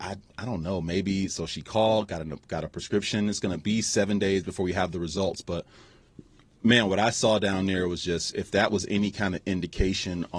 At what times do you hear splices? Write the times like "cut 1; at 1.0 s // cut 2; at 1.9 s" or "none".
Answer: none